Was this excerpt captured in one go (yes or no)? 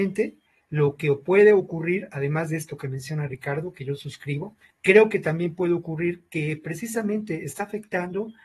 no